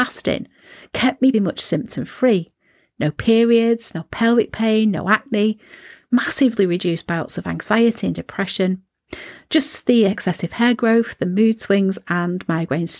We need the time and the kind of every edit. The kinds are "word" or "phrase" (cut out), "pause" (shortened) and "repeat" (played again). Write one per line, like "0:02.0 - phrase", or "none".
0:01.3 - word